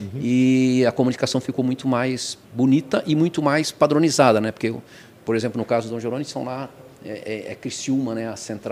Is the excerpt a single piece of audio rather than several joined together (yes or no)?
no